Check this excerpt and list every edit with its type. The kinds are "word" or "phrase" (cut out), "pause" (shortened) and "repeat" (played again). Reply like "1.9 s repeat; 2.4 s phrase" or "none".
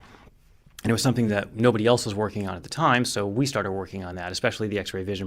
none